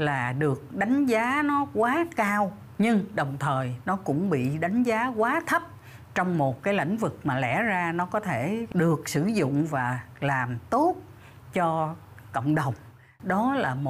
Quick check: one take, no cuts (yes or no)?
yes